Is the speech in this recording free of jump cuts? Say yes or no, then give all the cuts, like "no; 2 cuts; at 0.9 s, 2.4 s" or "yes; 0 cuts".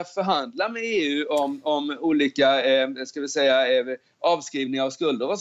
yes; 0 cuts